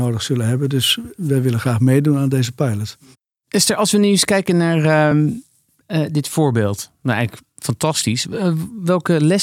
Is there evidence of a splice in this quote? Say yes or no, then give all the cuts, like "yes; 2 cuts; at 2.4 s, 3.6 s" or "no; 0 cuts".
no; 0 cuts